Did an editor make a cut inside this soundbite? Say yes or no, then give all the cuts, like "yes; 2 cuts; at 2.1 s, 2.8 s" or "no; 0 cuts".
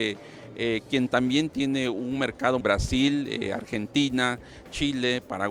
yes; 1 cut; at 2.6 s